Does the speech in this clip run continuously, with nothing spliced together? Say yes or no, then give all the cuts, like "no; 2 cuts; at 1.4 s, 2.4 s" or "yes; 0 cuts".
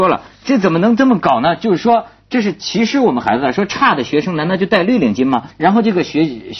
no; 1 cut; at 5.5 s